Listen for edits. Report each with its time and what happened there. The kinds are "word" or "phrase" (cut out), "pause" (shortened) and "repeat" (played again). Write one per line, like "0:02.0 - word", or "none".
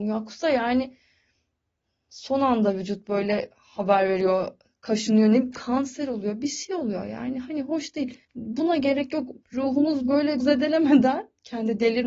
0:08.2 - pause
0:09.4 - pause
0:10.4 - word